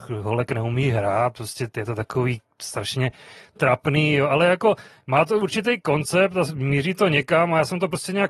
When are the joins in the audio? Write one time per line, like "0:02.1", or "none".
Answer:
none